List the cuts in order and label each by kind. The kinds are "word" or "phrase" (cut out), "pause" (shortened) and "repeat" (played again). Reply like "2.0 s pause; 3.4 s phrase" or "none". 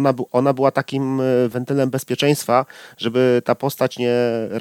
none